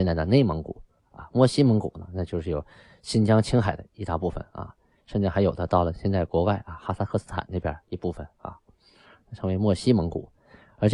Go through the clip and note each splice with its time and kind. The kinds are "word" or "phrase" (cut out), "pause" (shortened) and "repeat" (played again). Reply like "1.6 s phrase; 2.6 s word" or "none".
7.8 s pause